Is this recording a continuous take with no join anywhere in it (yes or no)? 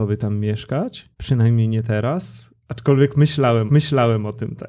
no